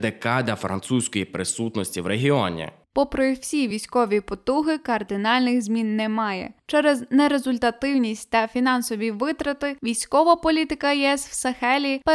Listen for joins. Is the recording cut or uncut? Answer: uncut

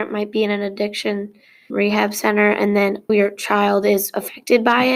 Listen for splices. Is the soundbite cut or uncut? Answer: cut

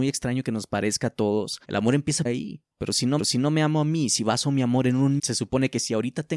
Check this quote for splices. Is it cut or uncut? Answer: cut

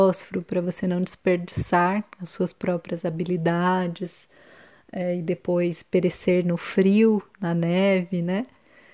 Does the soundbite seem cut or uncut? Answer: uncut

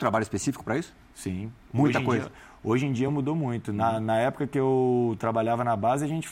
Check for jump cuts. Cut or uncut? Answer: uncut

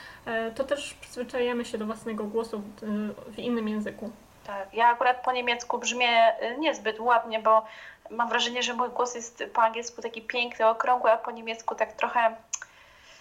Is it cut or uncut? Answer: uncut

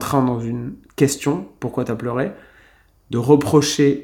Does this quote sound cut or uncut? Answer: uncut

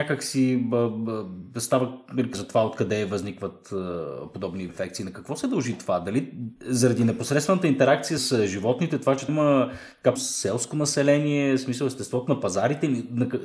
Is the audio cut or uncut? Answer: cut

